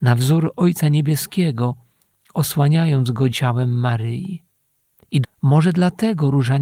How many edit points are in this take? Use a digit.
2